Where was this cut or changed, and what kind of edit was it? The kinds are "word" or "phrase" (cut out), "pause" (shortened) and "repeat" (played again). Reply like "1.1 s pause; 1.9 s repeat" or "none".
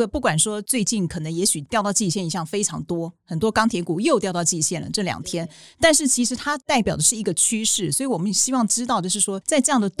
none